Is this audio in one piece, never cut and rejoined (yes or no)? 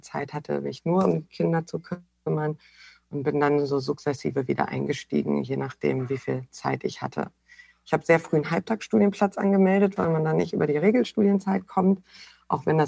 yes